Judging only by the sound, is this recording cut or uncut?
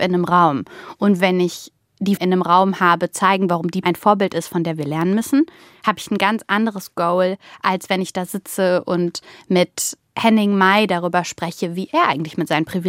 cut